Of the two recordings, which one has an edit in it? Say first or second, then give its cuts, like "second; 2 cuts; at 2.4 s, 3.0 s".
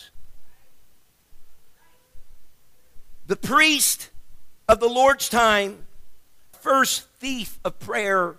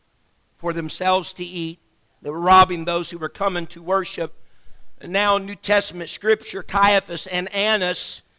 first; 2 cuts; at 4.6 s, 6.5 s